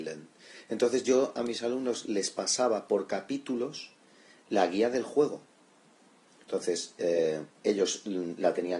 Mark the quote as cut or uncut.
uncut